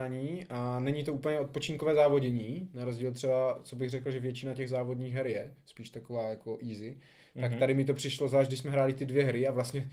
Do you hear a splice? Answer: no; 0 cuts

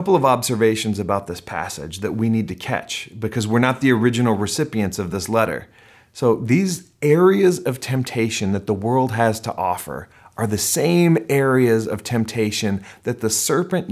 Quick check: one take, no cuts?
yes; 0 cuts

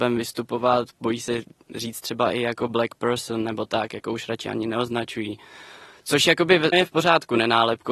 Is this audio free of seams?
no; 1 cut; at 6.7 s

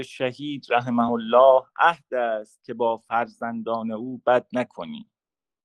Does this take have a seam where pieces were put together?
no; 0 cuts

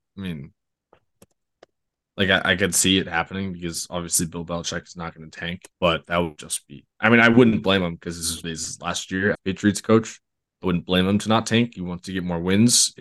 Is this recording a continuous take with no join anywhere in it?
no; 4 cuts; at 5.7 s, 6.4 s, 8.4 s, 9.3 s

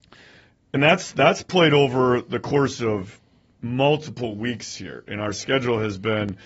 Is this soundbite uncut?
yes; 0 cuts

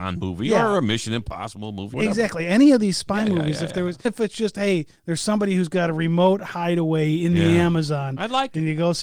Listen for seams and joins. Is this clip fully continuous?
no; 2 cuts; at 1.9 s, 4.0 s

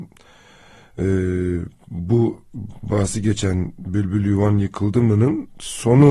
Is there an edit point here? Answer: no; 0 cuts

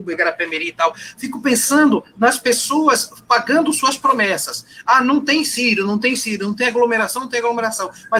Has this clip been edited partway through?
no; 0 cuts

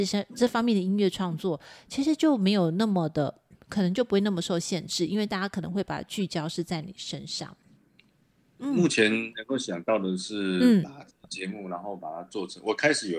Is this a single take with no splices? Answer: yes; 0 cuts

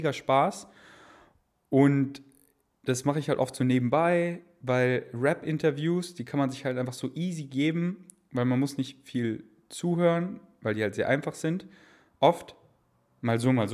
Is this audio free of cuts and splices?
yes; 0 cuts

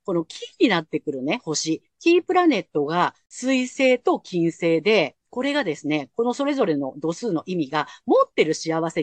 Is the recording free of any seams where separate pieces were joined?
no; 1 cut; at 5.2 s

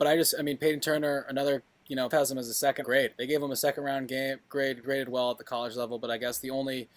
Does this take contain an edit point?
yes; 3 cuts; at 2.1 s, 2.8 s, 4.8 s

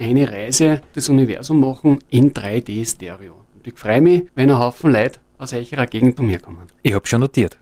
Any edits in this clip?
yes; 3 cuts; at 0.9 s, 4.3 s, 6.2 s

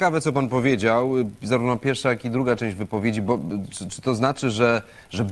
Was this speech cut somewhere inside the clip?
no; 0 cuts

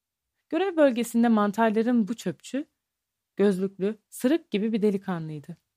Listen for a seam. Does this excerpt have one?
yes; 2 cuts; at 2.1 s, 4.0 s

